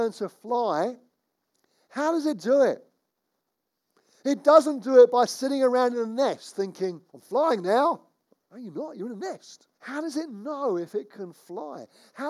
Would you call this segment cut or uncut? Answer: cut